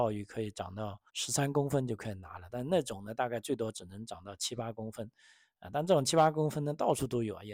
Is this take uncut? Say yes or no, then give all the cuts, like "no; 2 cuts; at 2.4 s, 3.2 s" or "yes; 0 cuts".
no; 1 cut; at 1.1 s